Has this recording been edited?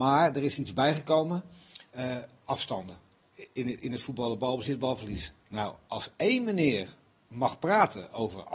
no; 0 cuts

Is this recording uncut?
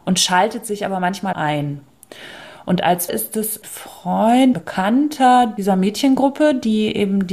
no; 4 cuts; at 1.3 s, 3.1 s, 3.6 s, 4.5 s

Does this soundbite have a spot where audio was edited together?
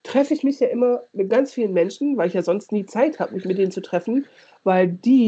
no; 0 cuts

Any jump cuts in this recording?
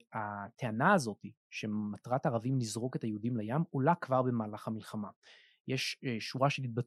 no; 0 cuts

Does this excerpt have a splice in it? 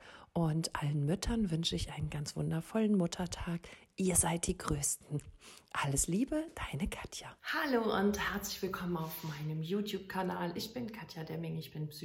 yes; 1 cut; at 7.4 s

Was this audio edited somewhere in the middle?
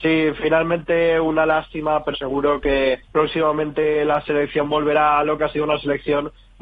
yes; 3 cuts; at 2.1 s, 3.1 s, 5.4 s

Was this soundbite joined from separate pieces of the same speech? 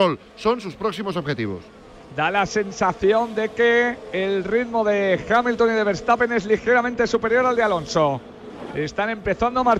no; 0 cuts

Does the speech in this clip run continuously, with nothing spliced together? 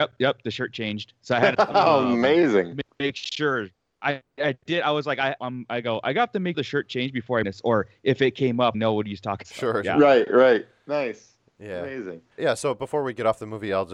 no; 7 cuts; at 1.5 s, 5.4 s, 6.5 s, 7.4 s, 8.7 s, 9.4 s, 12.4 s

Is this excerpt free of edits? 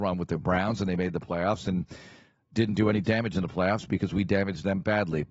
yes; 0 cuts

